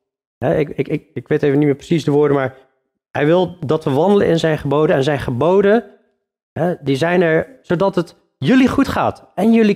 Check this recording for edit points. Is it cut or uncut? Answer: uncut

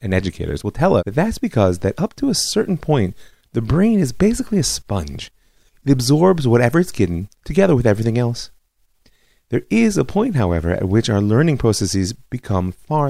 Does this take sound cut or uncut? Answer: cut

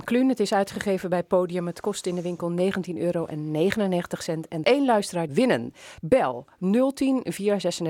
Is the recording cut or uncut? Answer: cut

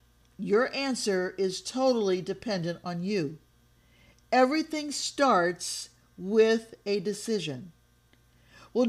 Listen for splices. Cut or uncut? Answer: uncut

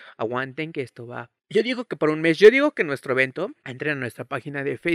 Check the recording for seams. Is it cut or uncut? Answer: cut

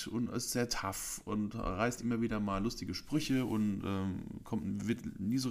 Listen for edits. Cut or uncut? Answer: uncut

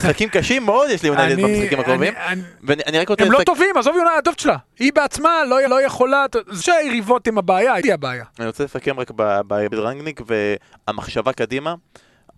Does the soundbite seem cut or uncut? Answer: cut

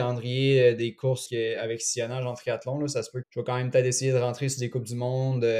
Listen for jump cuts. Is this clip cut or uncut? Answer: cut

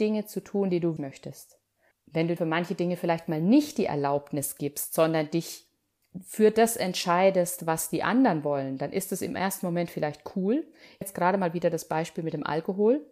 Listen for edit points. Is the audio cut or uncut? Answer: cut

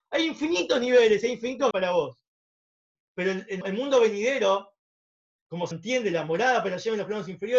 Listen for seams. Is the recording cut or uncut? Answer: cut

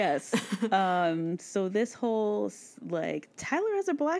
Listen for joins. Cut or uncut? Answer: uncut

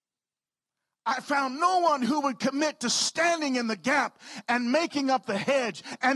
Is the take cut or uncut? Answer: uncut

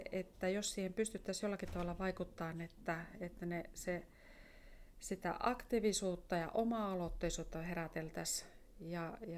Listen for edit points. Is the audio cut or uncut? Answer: uncut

